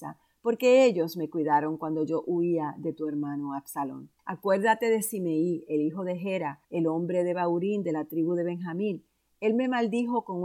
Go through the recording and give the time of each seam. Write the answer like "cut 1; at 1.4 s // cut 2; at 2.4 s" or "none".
cut 1; at 4.2 s // cut 2; at 6.6 s